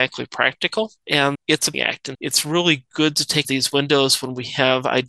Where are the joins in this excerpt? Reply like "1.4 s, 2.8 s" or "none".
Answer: 1.3 s, 1.7 s, 2.1 s, 3.4 s